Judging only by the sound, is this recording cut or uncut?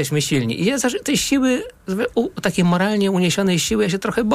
uncut